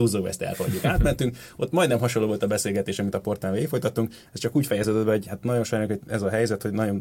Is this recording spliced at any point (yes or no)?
no